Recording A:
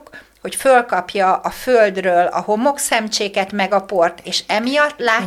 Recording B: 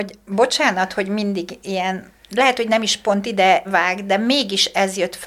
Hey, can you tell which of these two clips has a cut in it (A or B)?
B